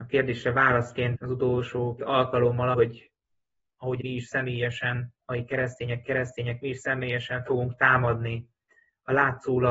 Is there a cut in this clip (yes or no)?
yes